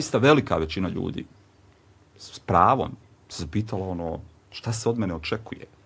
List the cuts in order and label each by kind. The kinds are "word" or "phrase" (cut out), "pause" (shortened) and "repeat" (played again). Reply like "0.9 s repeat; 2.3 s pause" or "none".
none